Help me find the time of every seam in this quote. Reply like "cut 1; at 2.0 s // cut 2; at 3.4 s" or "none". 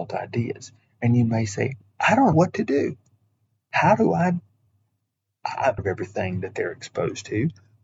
cut 1; at 2.3 s // cut 2; at 5.8 s